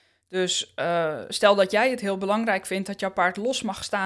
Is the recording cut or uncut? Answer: uncut